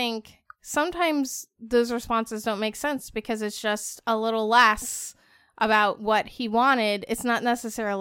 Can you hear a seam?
no; 0 cuts

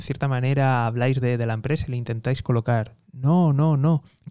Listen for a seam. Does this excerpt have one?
no; 0 cuts

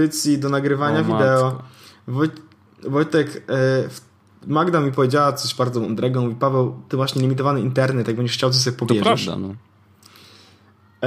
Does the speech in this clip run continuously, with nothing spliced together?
yes; 0 cuts

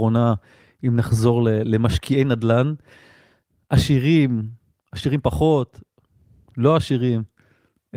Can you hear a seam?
no; 0 cuts

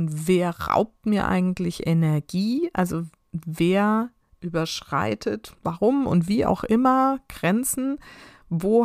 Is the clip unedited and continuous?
no; 1 cut; at 5.6 s

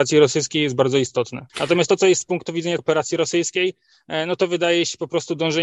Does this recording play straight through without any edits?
no; 3 cuts; at 1.5 s, 2.2 s, 2.8 s

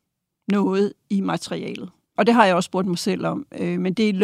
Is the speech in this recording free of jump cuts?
no; 1 cut; at 2.0 s

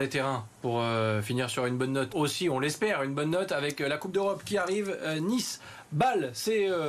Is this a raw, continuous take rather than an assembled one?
no; 1 cut; at 2.1 s

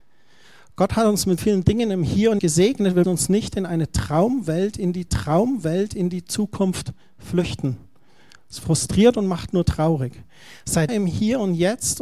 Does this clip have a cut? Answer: yes; 5 cuts; at 1.4 s, 2.4 s, 3.0 s, 5.1 s, 10.9 s

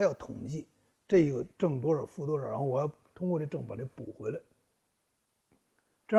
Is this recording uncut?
yes; 0 cuts

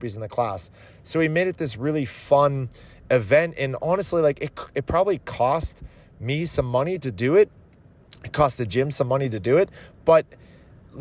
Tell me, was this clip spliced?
no; 0 cuts

